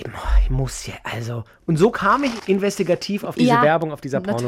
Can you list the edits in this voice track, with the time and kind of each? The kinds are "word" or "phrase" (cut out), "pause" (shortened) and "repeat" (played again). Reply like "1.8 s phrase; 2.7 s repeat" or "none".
2.4 s word